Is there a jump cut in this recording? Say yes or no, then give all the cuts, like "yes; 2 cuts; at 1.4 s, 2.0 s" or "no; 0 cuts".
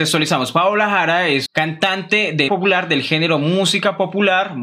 yes; 2 cuts; at 1.5 s, 2.5 s